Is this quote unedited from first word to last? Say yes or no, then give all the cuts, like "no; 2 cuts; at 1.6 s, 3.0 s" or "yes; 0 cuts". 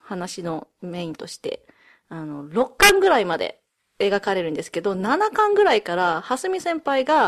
yes; 0 cuts